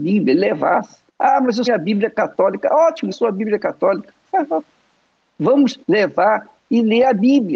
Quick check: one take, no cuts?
no; 4 cuts; at 1.1 s, 1.7 s, 3.1 s, 5.8 s

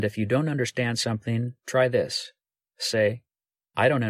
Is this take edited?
no; 0 cuts

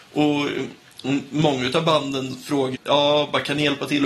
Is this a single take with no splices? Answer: no; 1 cut; at 2.7 s

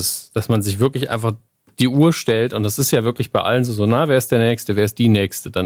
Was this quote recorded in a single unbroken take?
yes; 0 cuts

